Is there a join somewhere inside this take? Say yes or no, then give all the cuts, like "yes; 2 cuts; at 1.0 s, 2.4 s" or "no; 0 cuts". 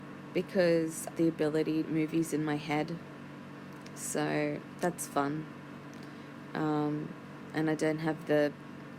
yes; 2 cuts; at 1.2 s, 1.8 s